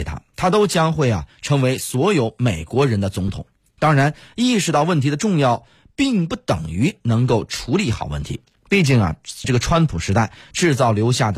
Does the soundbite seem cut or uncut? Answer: cut